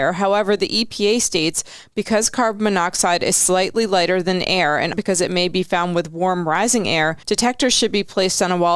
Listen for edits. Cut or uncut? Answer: cut